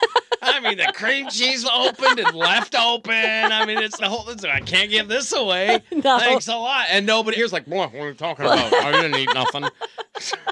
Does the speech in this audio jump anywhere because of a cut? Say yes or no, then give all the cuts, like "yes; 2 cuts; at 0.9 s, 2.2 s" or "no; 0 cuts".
yes; 3 cuts; at 1.6 s, 4.0 s, 7.4 s